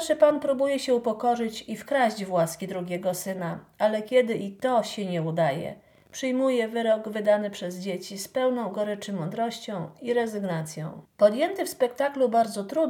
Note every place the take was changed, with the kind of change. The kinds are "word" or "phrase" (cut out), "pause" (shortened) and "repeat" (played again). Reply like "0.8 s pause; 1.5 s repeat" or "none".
11.1 s pause